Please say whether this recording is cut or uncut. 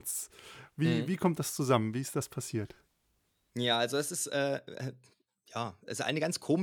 uncut